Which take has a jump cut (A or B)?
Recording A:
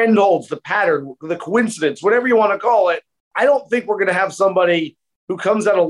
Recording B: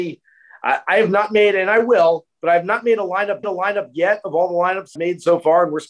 B